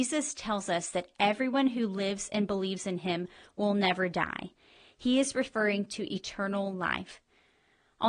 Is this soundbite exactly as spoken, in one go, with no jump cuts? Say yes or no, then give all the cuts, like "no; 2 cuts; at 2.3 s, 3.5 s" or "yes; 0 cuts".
yes; 0 cuts